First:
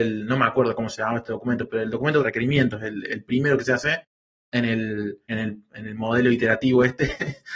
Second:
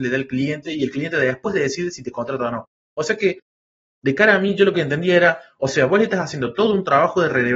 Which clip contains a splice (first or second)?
first